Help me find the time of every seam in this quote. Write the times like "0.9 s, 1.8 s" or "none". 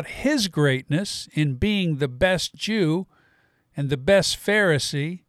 none